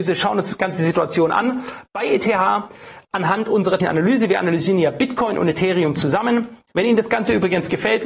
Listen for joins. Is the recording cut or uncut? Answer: cut